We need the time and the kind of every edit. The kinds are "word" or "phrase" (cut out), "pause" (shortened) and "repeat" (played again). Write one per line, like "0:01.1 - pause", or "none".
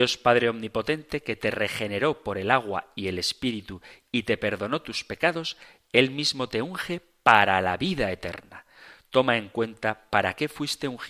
none